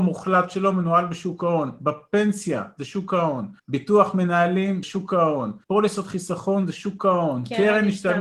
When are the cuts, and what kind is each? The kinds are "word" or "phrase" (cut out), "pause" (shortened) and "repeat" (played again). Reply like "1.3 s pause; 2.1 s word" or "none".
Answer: 3.6 s pause; 4.8 s word; 5.6 s pause